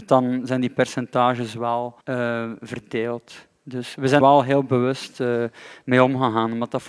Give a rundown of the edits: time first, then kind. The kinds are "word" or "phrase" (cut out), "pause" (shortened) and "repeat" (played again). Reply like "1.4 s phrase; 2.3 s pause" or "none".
2.0 s pause; 4.2 s word